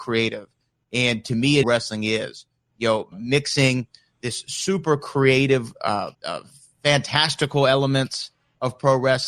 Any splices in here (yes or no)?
yes